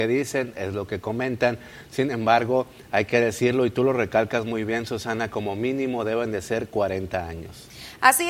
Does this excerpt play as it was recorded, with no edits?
yes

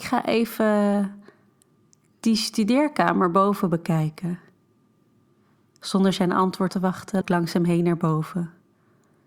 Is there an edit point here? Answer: yes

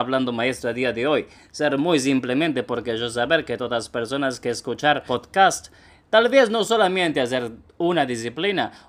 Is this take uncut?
yes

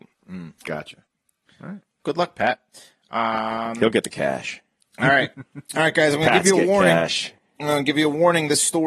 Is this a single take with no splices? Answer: yes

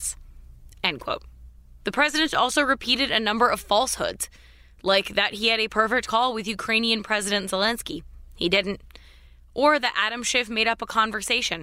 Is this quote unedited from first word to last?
yes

